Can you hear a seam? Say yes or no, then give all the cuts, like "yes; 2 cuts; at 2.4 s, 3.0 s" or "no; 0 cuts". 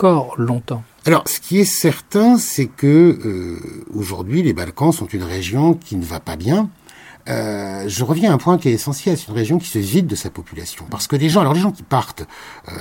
no; 0 cuts